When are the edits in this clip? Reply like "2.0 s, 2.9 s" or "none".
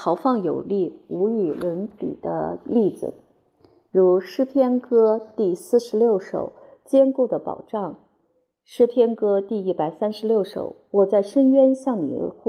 none